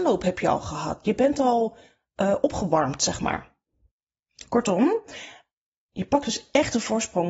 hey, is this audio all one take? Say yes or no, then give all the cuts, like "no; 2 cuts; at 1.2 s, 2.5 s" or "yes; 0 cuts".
yes; 0 cuts